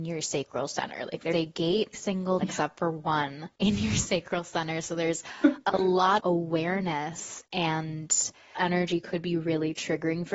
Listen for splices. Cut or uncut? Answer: cut